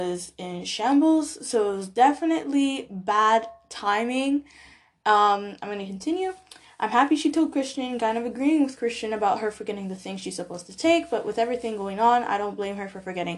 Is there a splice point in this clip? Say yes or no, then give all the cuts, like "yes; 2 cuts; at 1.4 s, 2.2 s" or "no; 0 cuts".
no; 0 cuts